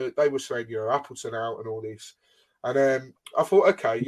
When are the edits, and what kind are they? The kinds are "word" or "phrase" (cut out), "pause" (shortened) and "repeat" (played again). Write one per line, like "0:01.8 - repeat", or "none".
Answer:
none